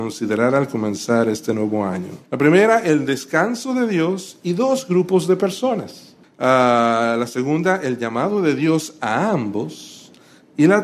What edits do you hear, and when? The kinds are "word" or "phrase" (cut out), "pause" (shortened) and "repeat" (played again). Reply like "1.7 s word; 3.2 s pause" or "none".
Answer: 2.2 s pause; 6.2 s pause